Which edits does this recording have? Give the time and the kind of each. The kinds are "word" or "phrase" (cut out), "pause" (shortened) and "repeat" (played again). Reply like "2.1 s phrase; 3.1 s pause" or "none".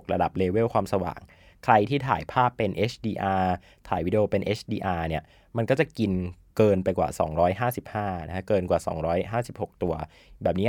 none